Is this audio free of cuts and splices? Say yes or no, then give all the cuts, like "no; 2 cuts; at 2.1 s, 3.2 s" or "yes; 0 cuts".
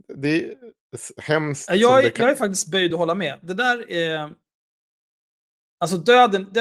yes; 0 cuts